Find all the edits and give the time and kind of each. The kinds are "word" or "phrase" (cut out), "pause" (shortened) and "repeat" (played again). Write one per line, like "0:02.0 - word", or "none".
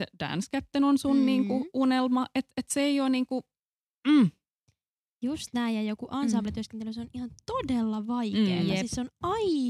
none